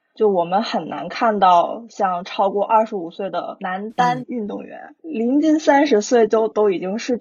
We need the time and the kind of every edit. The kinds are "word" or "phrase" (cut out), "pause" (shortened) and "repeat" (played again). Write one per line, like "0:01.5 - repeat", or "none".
0:04.2 - phrase